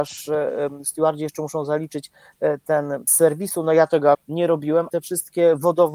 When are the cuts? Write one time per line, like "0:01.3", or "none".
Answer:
0:03.1
0:04.1
0:04.9